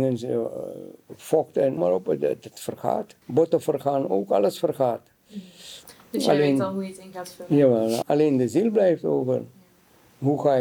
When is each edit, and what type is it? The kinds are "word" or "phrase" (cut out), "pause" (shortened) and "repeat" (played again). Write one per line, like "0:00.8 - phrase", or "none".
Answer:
0:01.8 - phrase
0:03.2 - pause
0:08.0 - word